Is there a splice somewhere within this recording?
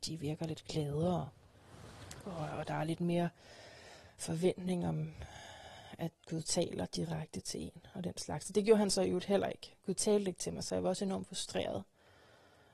no; 0 cuts

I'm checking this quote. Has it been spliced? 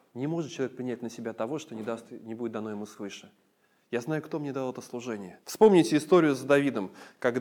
yes; 1 cut; at 5.4 s

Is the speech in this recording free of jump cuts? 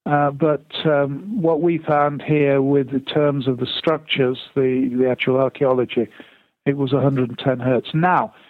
yes; 0 cuts

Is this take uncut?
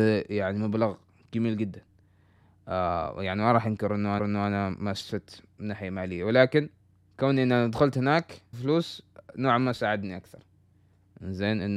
no; 3 cuts; at 4.2 s, 6.8 s, 8.5 s

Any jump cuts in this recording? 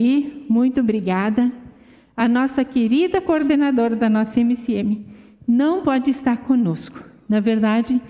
no; 0 cuts

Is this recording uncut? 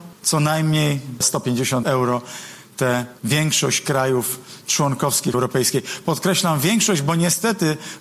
no; 3 cuts; at 1.8 s, 3.2 s, 5.3 s

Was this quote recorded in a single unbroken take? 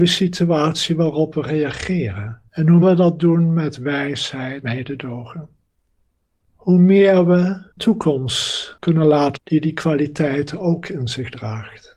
no; 5 cuts; at 2.5 s, 2.8 s, 4.6 s, 7.8 s, 9.4 s

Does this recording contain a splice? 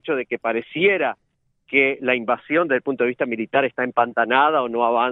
no; 0 cuts

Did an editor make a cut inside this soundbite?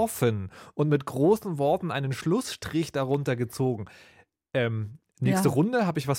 no; 0 cuts

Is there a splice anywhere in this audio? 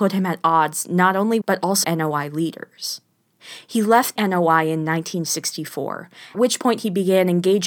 yes; 4 cuts; at 1.4 s, 1.8 s, 4.2 s, 6.3 s

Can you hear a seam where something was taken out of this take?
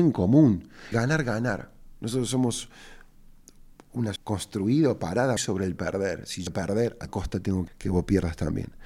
yes; 7 cuts; at 0.9 s, 4.2 s, 5.4 s, 5.8 s, 6.5 s, 7.1 s, 7.7 s

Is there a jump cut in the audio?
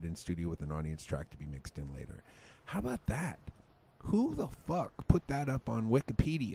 no; 0 cuts

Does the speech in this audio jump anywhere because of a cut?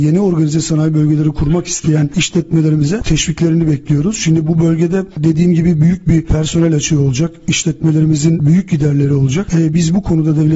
no; 0 cuts

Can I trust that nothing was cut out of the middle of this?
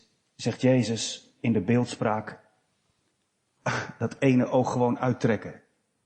yes; 0 cuts

